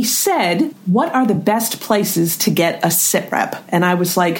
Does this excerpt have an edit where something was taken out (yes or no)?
no